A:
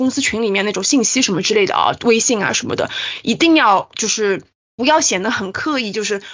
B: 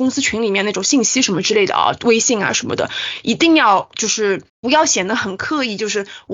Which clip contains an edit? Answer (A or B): B